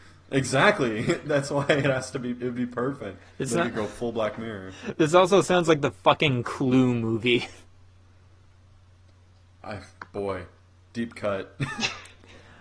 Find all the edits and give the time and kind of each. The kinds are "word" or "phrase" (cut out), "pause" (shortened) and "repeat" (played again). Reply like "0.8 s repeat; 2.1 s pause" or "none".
3.5 s word